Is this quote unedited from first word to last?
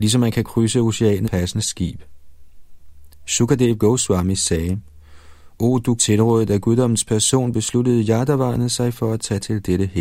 no; 2 cuts; at 1.2 s, 6.0 s

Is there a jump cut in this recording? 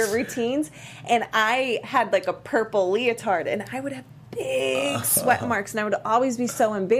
no; 0 cuts

